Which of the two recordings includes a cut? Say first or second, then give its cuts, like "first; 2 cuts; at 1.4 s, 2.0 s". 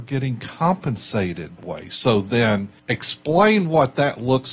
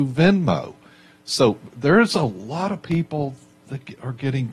first; 2 cuts; at 1.6 s, 2.8 s